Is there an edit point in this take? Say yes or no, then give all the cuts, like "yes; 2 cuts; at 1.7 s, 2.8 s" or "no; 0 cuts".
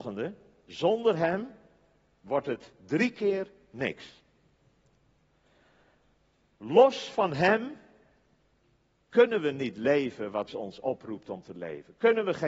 yes; 1 cut; at 10.5 s